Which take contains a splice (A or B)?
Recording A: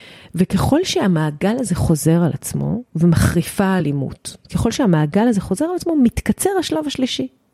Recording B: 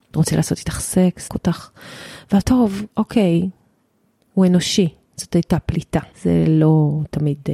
B